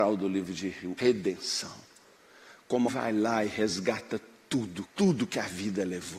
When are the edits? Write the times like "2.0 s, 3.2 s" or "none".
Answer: 1.0 s, 2.9 s, 4.9 s